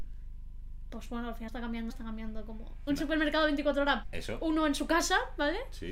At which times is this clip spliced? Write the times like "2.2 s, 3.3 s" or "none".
1.5 s, 1.9 s, 2.9 s, 4.0 s